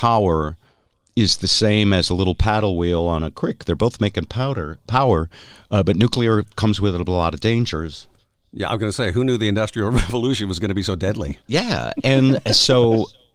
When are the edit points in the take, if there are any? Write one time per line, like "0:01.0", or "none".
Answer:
none